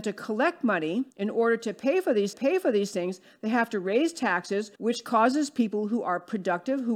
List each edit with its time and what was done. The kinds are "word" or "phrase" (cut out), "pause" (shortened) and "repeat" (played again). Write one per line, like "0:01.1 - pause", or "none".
0:01.1 - pause
0:02.3 - repeat
0:04.8 - pause

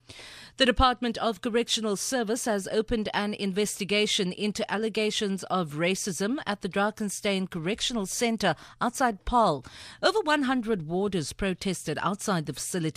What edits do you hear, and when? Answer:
none

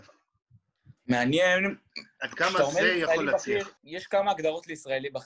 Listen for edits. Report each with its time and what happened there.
0:01.0 - pause
0:03.8 - pause

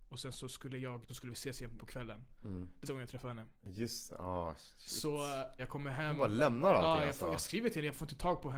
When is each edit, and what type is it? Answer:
0:01.1 - phrase
0:01.8 - phrase
0:02.9 - word
0:03.6 - pause
0:05.6 - word

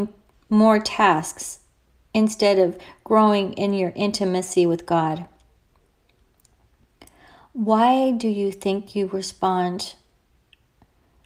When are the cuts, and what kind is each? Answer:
none

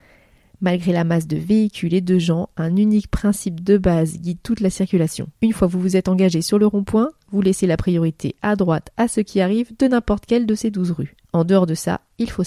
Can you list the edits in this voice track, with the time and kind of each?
0:05.4 - pause
0:11.2 - pause

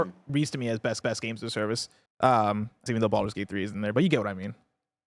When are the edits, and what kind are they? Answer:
0:01.0 - repeat
0:02.1 - pause
0:02.9 - word

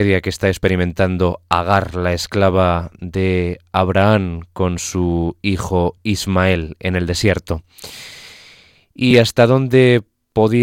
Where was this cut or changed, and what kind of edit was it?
none

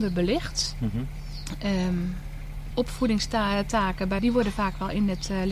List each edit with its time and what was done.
0:02.7 - phrase
0:04.2 - word

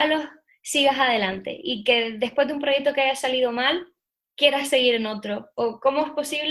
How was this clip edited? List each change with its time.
none

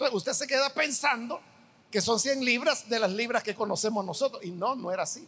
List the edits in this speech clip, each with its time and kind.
none

